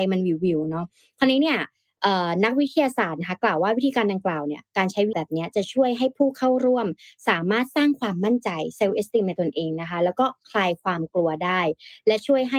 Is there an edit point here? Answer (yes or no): yes